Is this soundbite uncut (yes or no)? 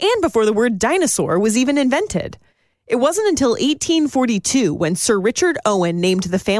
yes